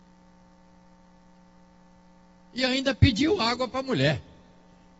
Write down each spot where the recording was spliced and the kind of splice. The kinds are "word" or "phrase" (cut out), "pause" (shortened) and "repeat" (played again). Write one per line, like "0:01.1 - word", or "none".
none